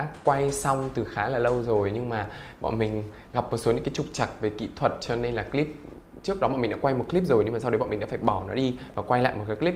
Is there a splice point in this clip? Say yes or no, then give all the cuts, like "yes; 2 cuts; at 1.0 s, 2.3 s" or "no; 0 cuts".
no; 0 cuts